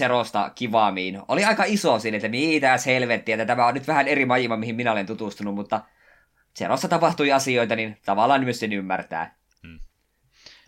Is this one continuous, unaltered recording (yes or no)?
yes